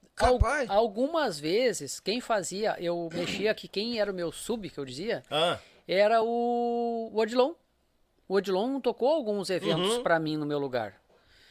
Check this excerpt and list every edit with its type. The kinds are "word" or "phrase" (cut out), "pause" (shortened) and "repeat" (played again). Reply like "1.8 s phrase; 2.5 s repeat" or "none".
none